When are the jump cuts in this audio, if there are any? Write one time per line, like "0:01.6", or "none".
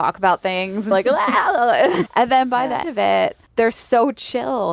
0:00.9
0:02.1
0:02.8
0:03.5